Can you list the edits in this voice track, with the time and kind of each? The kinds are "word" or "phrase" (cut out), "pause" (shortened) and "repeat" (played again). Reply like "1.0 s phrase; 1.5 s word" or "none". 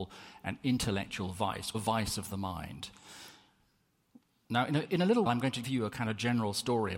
1.7 s word; 4.8 s word; 5.3 s word; 5.6 s word